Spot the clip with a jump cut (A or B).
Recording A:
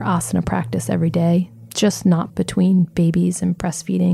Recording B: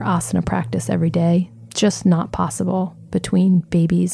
A